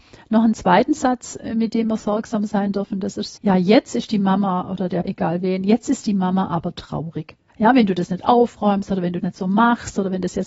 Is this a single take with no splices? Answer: no; 4 cuts; at 3.4 s, 5.0 s, 7.5 s, 9.2 s

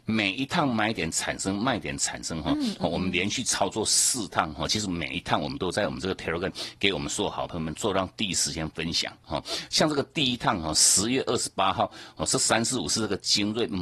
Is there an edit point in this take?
no; 0 cuts

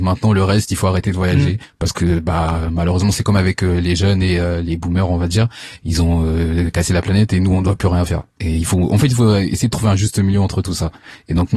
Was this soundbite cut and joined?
yes; 1 cut; at 8.3 s

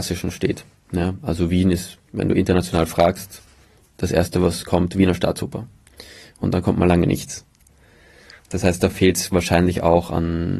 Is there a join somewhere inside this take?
no; 0 cuts

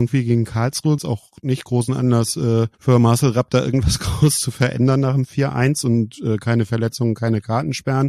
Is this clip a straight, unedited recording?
no; 2 cuts; at 1.0 s, 2.7 s

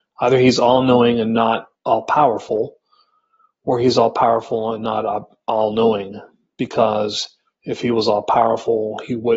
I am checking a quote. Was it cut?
yes; 1 cut; at 1.7 s

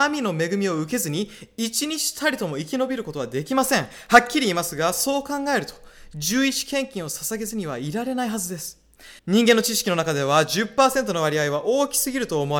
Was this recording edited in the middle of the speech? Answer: yes; 1 cut; at 9.2 s

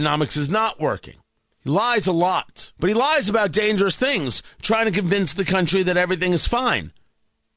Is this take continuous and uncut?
no; 2 cuts; at 1.4 s, 2.8 s

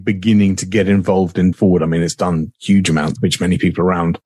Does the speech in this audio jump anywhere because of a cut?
yes; 2 cuts; at 1.5 s, 3.2 s

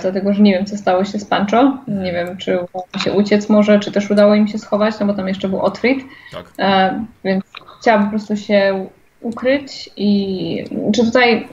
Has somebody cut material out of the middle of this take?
no; 0 cuts

